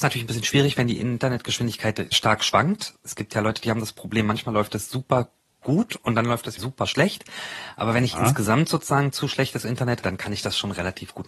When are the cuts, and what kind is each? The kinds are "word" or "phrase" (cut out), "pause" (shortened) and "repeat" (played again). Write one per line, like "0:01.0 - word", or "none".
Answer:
0:02.1 - word
0:06.6 - word
0:10.0 - word

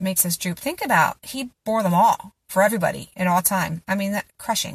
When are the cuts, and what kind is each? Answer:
0:01.6 - pause

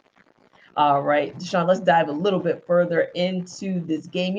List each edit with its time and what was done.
none

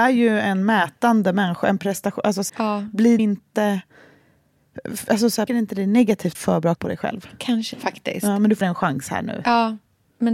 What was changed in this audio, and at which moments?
0:02.5 - word
0:03.2 - word
0:05.5 - word
0:06.3 - word
0:06.8 - word
0:07.7 - word
0:08.6 - word

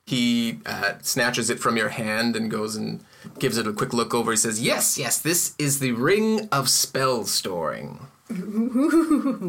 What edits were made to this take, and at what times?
none

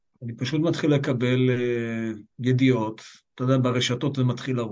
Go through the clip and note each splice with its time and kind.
0:02.3 - pause

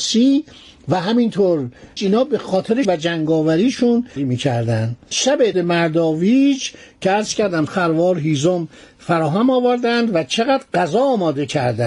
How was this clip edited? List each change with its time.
0:02.0 - word
0:02.8 - word
0:04.2 - word
0:05.1 - word
0:05.5 - word
0:07.7 - word

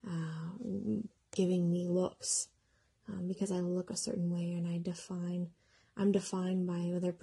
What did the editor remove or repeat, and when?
none

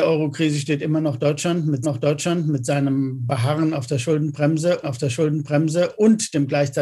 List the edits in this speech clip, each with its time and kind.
0:01.8 - repeat
0:04.8 - repeat

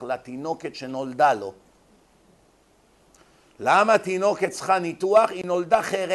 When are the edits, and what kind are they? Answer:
none

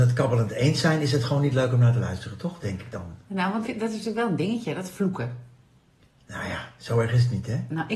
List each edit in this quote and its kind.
0:03.6 - word

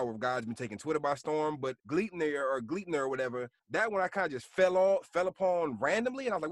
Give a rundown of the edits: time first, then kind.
0:01.8 - pause
0:03.6 - pause

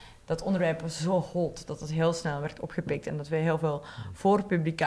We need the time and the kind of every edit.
none

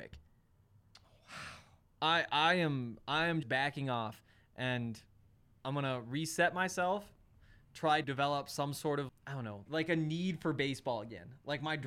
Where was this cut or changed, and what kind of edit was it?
0:03.4 - word
0:08.0 - word
0:09.1 - word
0:09.7 - word

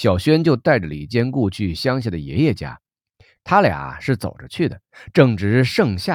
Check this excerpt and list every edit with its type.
none

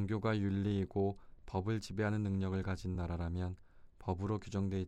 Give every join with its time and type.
none

